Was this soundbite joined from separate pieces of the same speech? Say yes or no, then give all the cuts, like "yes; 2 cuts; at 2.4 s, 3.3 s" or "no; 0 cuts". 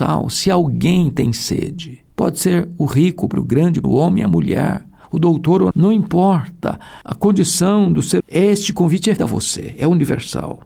yes; 7 cuts; at 2.1 s, 3.3 s, 3.8 s, 5.7 s, 7.0 s, 8.2 s, 9.2 s